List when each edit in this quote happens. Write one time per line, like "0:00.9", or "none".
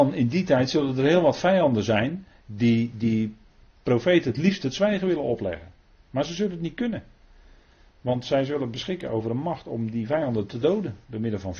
none